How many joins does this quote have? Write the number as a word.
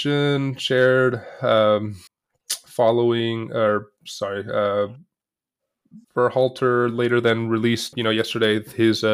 three